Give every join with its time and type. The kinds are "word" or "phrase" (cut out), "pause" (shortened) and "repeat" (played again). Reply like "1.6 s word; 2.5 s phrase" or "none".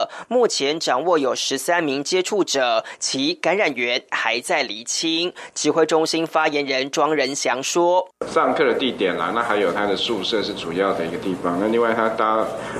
8.1 s pause

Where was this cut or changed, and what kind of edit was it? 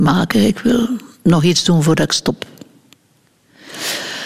none

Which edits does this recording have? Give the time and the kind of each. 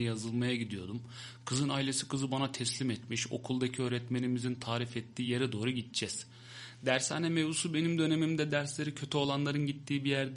none

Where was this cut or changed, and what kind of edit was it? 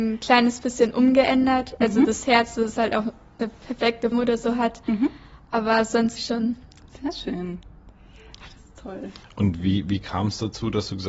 4.1 s word; 6.2 s word

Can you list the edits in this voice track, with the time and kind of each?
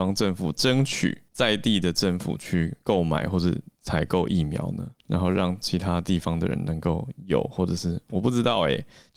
1.3 s pause; 5.0 s pause

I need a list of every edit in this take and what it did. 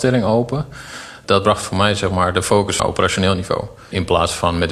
2.8 s phrase

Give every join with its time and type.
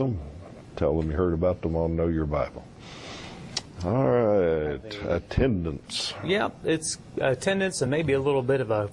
none

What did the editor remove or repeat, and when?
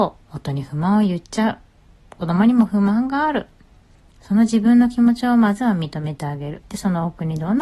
none

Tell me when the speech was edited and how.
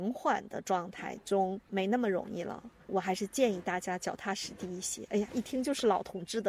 1.6 s pause

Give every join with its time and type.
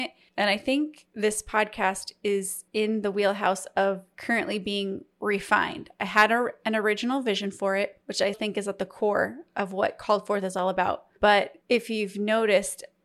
2.7 s pause; 8.3 s word; 11.6 s pause

